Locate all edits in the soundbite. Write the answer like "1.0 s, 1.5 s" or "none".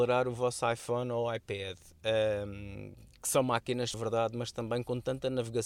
3.9 s